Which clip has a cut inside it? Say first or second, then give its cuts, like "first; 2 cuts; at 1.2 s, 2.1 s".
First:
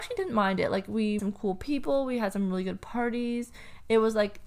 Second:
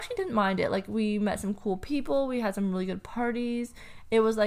first; 1 cut; at 1.2 s